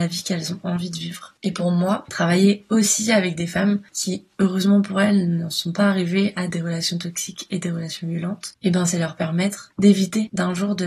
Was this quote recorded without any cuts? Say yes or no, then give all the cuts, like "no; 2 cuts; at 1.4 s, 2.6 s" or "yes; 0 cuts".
yes; 0 cuts